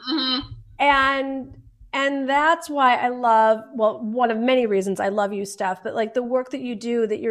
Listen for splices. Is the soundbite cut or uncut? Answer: uncut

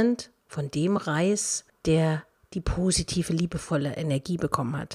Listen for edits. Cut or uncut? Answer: uncut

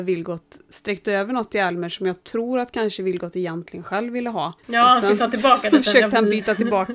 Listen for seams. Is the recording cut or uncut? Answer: cut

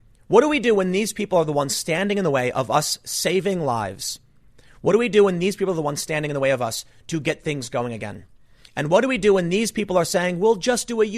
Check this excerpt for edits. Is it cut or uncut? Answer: uncut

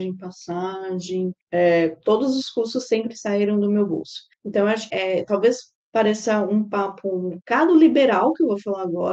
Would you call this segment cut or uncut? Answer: cut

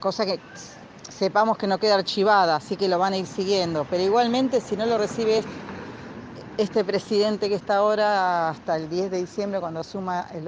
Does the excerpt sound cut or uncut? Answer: uncut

